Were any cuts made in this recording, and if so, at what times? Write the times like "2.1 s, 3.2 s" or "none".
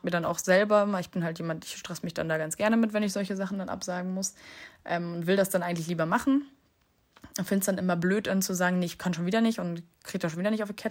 none